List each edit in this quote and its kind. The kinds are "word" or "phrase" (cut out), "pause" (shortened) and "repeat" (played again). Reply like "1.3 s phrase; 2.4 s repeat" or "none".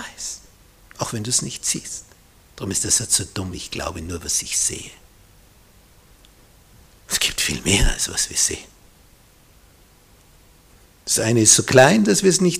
none